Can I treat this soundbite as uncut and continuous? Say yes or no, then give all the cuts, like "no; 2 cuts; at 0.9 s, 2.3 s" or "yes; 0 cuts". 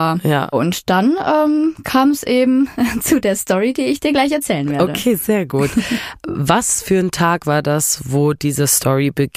yes; 0 cuts